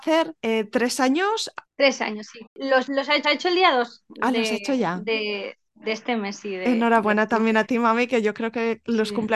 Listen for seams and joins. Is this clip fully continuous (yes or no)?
no